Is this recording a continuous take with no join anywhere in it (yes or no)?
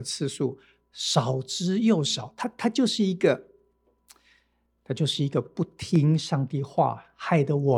yes